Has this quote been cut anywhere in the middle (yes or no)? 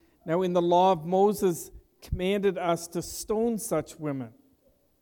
no